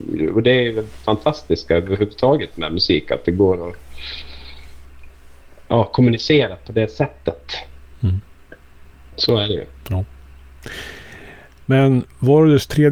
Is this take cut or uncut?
uncut